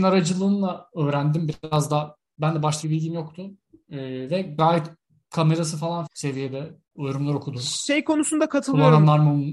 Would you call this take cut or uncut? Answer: cut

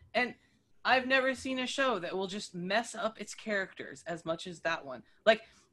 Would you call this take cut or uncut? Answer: uncut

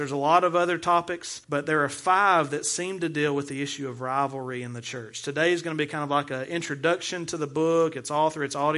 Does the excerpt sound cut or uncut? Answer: cut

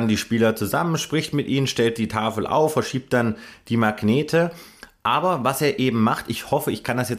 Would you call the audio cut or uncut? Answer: uncut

